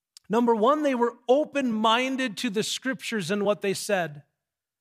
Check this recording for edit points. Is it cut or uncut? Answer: uncut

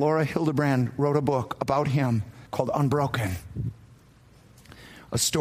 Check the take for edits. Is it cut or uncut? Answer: cut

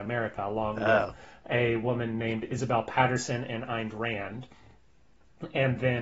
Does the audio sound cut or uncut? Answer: uncut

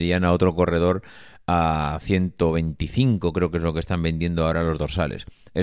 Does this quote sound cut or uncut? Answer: uncut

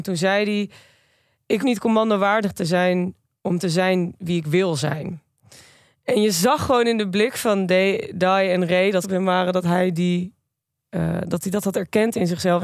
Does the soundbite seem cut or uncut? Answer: cut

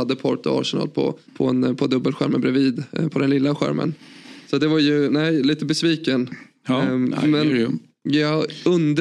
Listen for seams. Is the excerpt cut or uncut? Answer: cut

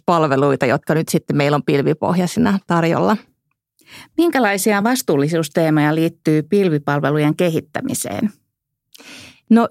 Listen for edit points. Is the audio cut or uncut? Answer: uncut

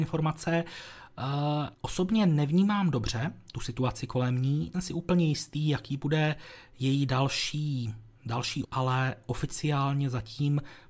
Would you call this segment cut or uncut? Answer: cut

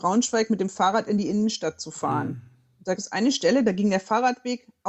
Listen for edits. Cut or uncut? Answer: cut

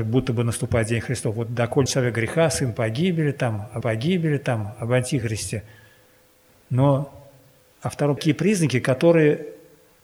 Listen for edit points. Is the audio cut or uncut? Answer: cut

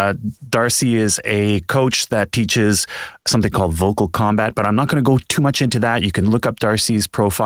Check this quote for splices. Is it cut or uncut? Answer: uncut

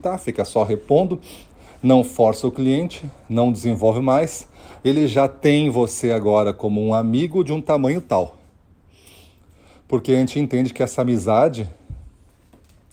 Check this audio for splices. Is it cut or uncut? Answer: uncut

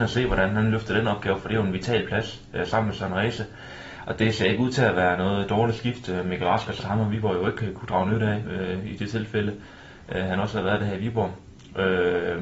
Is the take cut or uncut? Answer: cut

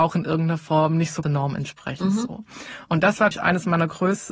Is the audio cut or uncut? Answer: cut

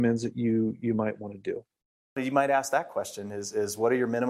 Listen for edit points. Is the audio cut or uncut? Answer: uncut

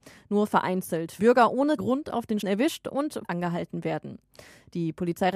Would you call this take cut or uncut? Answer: cut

